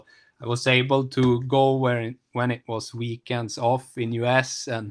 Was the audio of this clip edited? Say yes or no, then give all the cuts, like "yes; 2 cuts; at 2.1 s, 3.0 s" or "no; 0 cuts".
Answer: no; 0 cuts